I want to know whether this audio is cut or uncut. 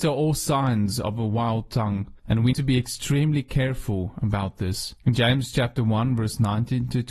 cut